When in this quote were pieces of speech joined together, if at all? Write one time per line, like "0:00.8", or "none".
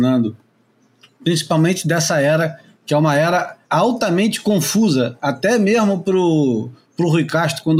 0:03.6